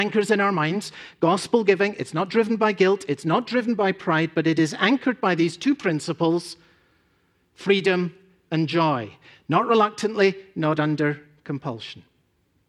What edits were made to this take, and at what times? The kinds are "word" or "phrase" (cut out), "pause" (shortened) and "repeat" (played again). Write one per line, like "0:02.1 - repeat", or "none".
none

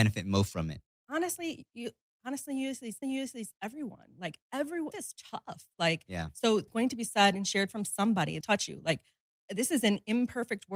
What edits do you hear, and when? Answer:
0:03.0 - repeat
0:04.9 - word
0:06.7 - phrase
0:08.4 - phrase

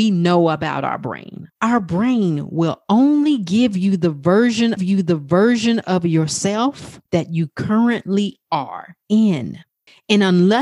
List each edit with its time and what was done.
0:01.5 - pause
0:04.8 - repeat
0:07.1 - pause
0:09.0 - pause

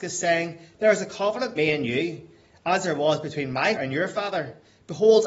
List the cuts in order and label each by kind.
0:01.6 - word
0:03.8 - word

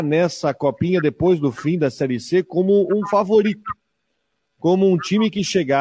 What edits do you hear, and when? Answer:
none

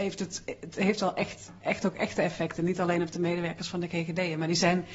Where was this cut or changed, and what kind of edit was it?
none

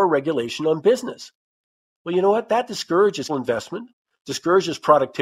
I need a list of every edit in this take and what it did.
0:03.3 - word

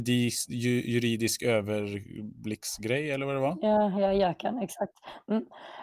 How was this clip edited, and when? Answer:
none

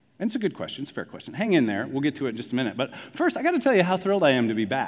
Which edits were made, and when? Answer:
none

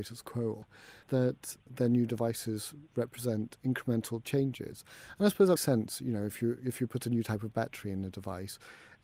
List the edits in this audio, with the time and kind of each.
0:01.0 - word
0:01.7 - word
0:05.6 - word

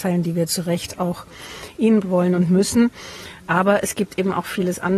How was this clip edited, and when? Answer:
0:02.0 - word

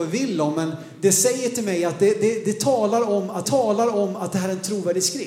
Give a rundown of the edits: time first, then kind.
0:03.4 - repeat

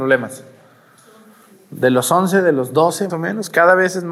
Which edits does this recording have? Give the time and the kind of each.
0:03.1 - word

